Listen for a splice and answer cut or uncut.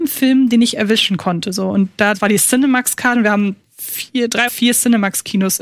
cut